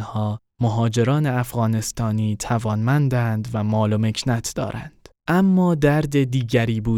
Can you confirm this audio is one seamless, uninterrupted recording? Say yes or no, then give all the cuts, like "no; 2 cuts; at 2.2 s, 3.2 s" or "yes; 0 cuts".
no; 1 cut; at 5.2 s